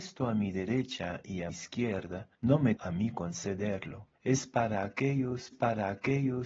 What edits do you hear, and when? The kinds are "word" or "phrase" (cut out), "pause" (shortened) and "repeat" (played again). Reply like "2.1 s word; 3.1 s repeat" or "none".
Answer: 1.5 s word; 2.3 s pause; 2.8 s word; 4.2 s pause; 5.5 s repeat

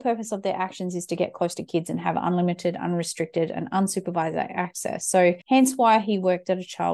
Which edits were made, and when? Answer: 5.4 s pause

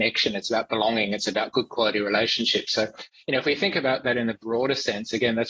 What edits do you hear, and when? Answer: none

